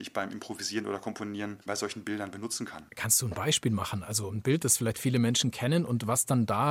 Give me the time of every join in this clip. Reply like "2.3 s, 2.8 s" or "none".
2.9 s